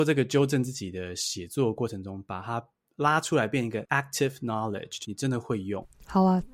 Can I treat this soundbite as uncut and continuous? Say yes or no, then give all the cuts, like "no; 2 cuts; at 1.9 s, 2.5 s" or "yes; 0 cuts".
yes; 0 cuts